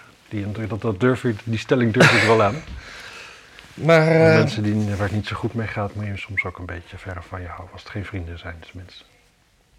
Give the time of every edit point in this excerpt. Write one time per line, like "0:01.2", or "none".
none